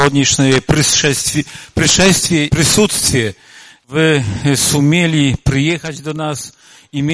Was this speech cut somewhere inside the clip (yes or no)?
yes